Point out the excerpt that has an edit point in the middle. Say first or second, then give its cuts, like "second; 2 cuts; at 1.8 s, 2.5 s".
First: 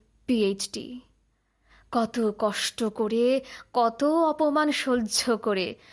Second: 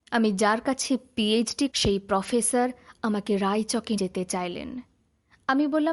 second; 2 cuts; at 1.7 s, 4.0 s